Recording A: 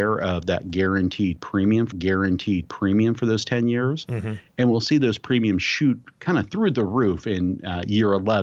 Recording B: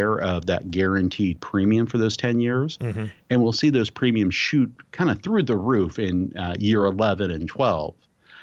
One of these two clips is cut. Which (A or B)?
A